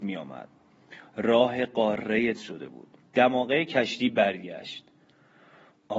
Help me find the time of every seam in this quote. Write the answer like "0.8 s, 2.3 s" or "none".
2.3 s, 3.1 s